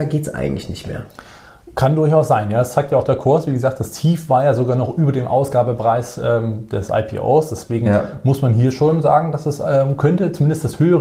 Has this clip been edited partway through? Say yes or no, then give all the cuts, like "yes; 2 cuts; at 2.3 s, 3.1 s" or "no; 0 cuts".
no; 0 cuts